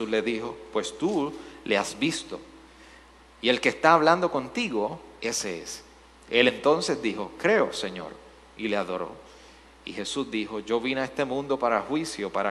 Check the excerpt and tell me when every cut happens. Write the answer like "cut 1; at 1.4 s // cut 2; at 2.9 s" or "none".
none